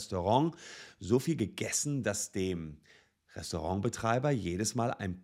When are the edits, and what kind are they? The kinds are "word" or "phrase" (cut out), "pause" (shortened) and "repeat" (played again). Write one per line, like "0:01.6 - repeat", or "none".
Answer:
none